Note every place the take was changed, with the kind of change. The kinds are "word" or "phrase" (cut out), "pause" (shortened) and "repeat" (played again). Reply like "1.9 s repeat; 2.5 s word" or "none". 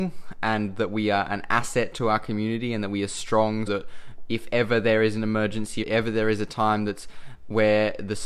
3.7 s word; 5.8 s phrase

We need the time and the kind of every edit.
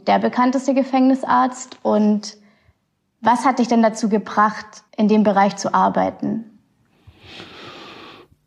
4.9 s pause

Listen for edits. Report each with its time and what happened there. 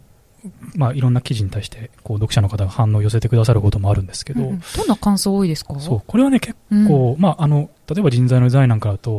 7.8 s pause

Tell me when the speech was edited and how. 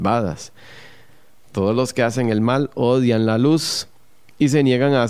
none

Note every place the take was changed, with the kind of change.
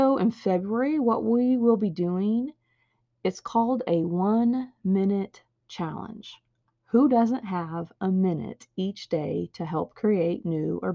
none

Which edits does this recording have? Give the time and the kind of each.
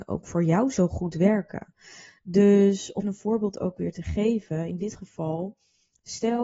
3.0 s word

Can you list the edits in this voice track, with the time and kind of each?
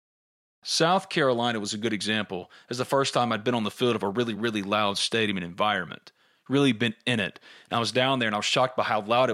none

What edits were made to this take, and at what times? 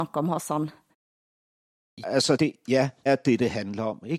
2.0 s word; 2.4 s word; 3.1 s word

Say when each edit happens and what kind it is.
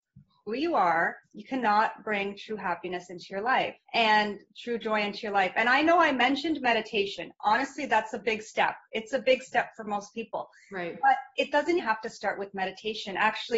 1.2 s pause; 3.8 s pause; 11.8 s word

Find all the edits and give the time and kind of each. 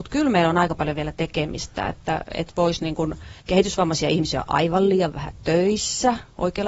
3.4 s pause

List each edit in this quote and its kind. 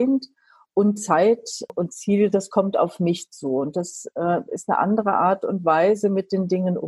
none

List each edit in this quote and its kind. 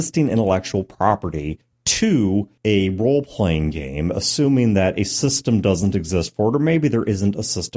none

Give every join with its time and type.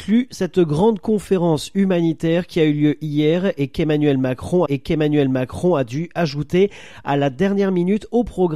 4.7 s repeat

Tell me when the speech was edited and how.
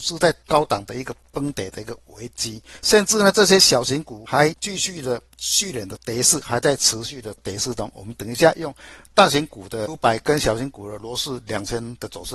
9.9 s phrase

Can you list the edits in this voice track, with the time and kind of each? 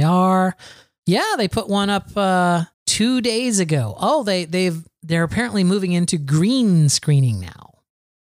2.7 s pause

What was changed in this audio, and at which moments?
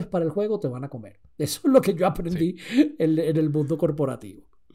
none

